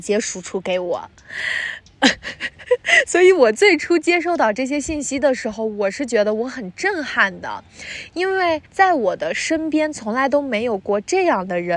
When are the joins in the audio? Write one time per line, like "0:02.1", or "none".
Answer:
0:08.7